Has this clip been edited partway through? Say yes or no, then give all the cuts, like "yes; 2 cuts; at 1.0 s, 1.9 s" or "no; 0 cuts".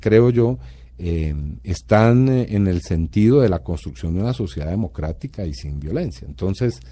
no; 0 cuts